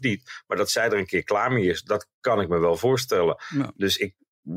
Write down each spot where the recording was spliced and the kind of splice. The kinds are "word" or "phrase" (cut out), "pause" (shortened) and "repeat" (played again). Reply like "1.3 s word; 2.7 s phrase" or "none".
none